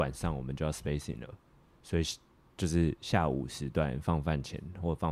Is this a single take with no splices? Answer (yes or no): yes